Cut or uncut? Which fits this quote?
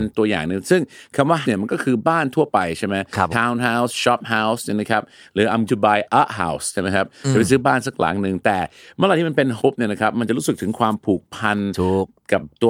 cut